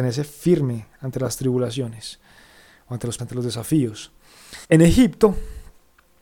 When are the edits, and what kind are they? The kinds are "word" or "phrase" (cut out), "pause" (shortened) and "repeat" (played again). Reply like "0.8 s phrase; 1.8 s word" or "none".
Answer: 3.2 s word; 4.6 s pause